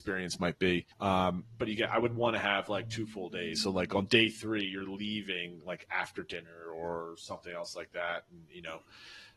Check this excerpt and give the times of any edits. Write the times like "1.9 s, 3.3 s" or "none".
0.9 s